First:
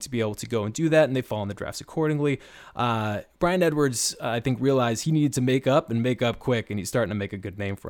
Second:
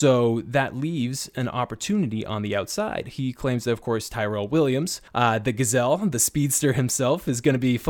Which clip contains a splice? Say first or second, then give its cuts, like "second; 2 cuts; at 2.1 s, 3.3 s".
second; 1 cut; at 5.1 s